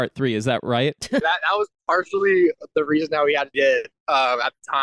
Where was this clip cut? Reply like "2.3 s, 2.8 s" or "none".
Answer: 1.2 s, 3.5 s